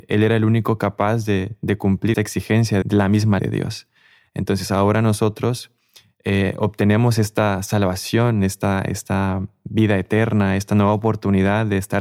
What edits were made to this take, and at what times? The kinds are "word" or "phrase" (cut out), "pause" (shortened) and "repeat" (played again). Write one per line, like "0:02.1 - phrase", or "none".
0:02.1 - word
0:02.8 - word
0:03.4 - word